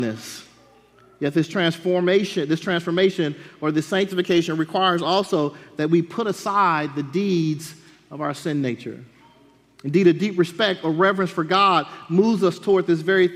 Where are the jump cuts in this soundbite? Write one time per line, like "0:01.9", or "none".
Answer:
none